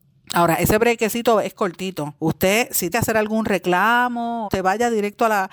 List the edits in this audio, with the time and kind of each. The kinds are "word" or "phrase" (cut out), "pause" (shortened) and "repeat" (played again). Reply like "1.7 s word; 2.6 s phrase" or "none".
2.2 s pause; 2.9 s word; 4.4 s phrase

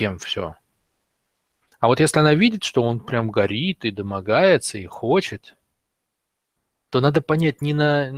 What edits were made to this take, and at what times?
none

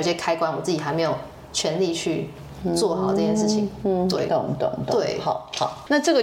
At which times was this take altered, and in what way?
none

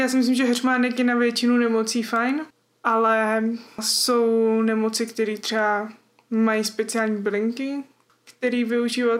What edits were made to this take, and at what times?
none

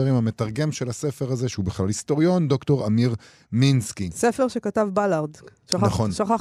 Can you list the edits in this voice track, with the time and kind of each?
none

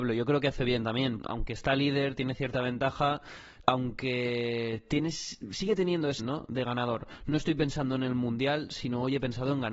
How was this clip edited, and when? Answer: 1.2 s word; 3.6 s phrase; 6.2 s word

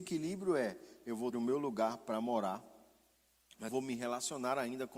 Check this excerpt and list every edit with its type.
1.3 s word; 3.7 s word

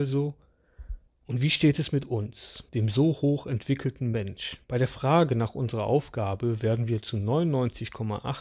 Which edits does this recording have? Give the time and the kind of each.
1.1 s pause; 2.7 s pause; 4.6 s pause

